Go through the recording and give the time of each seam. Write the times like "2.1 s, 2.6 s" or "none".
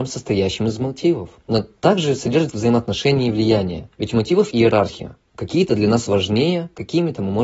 1.4 s, 2.5 s, 3.9 s, 4.5 s